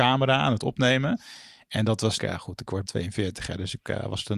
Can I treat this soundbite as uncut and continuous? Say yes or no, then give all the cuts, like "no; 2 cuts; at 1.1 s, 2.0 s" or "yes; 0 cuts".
no; 2 cuts; at 2.2 s, 2.8 s